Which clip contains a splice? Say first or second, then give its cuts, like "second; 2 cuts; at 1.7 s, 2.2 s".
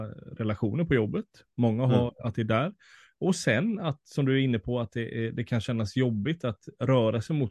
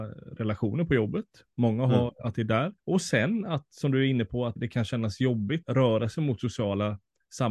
second; 3 cuts; at 2.8 s, 4.6 s, 5.6 s